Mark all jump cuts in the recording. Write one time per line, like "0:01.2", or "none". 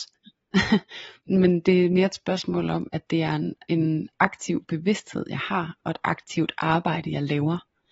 0:01.3